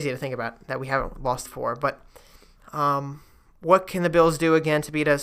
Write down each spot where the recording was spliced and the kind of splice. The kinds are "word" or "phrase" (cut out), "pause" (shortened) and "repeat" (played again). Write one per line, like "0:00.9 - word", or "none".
0:01.4 - phrase